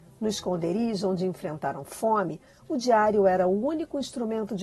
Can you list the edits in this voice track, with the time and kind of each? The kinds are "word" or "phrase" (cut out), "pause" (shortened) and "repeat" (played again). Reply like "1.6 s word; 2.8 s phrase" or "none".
none